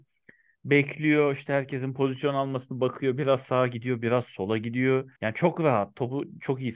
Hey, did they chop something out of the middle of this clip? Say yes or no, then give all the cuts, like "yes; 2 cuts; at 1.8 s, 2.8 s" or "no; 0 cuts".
yes; 1 cut; at 5.2 s